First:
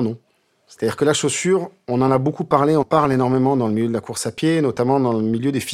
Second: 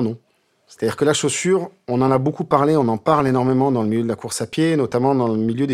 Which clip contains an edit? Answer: first; 1 cut; at 2.8 s

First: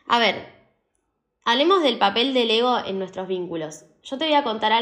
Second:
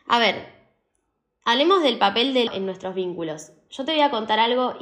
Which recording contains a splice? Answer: second; 1 cut; at 2.5 s

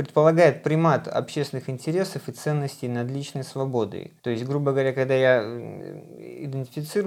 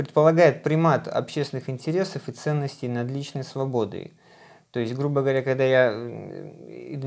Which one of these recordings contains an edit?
first; 1 cut; at 4.2 s

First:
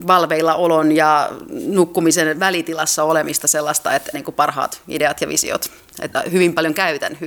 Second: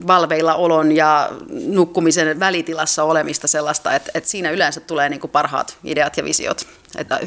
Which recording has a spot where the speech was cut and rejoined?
first; 1 cut; at 4.1 s

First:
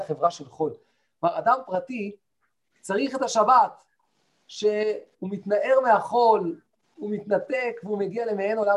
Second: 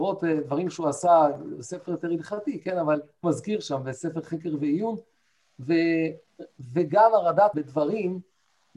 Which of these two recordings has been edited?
second; 2 cuts; at 3.2 s, 7.5 s

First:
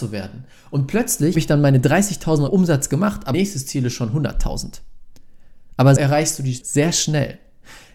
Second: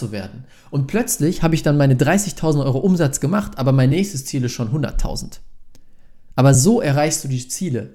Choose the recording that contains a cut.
first; 5 cuts; at 1.3 s, 2.5 s, 3.3 s, 6.0 s, 6.6 s

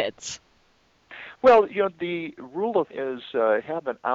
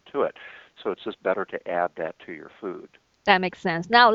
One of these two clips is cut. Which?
first; 1 cut; at 2.9 s

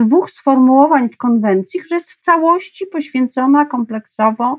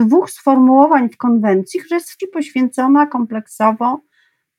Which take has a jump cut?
second; 1 cut; at 2.2 s

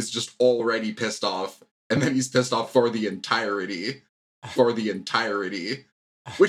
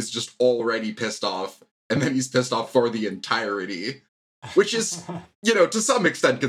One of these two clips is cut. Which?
first; 1 cut; at 4.5 s

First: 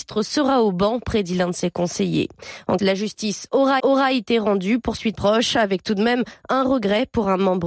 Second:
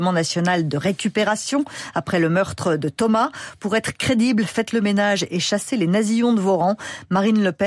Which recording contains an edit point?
first; 3 cuts; at 2.8 s, 3.8 s, 5.1 s

